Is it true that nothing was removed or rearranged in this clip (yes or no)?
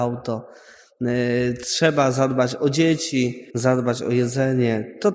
no